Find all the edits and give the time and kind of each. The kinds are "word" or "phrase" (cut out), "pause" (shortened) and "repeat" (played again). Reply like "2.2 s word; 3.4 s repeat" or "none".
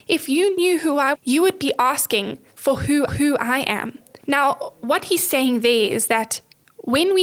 1.1 s word; 3.1 s repeat; 4.2 s pause